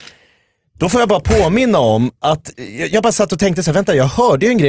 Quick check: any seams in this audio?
yes; 1 cut; at 2.5 s

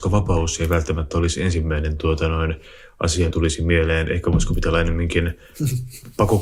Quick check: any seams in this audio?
yes; 1 cut; at 3.3 s

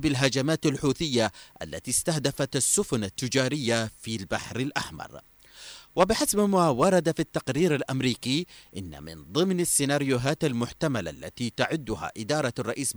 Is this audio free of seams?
yes; 0 cuts

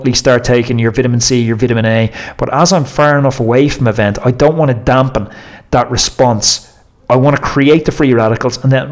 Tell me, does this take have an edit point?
yes; 1 cut; at 6.9 s

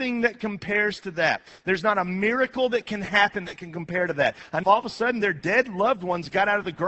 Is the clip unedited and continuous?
no; 1 cut; at 4.6 s

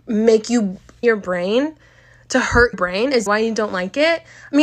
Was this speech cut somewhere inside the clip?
yes; 3 cuts; at 1.0 s, 2.7 s, 3.3 s

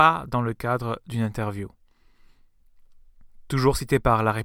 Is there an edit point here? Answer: no; 0 cuts

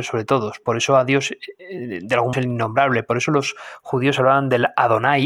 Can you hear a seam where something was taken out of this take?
yes; 1 cut; at 2.3 s

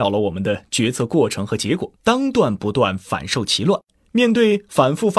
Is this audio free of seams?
no; 1 cut; at 2.0 s

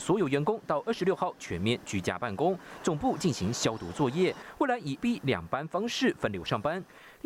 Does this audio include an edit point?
yes; 1 cut; at 5.0 s

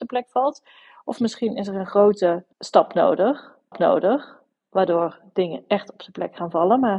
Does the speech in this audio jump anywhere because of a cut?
yes; 2 cuts; at 2.5 s, 3.7 s

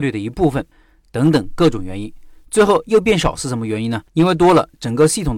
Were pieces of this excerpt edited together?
yes; 1 cut; at 4.1 s

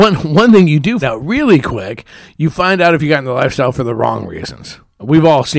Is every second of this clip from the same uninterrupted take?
no; 1 cut; at 1.0 s

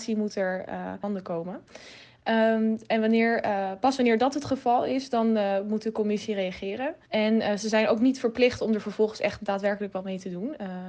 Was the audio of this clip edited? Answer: yes; 1 cut; at 7.0 s

